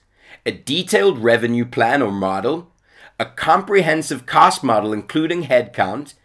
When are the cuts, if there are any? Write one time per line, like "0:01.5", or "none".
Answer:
none